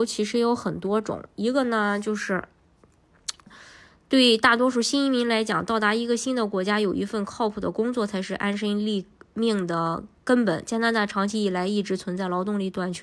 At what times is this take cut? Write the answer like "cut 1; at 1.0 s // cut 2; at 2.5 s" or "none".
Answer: cut 1; at 3.5 s